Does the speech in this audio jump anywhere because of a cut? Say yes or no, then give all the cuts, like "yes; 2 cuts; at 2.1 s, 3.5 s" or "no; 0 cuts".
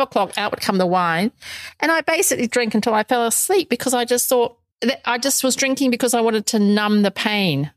yes; 1 cut; at 2.5 s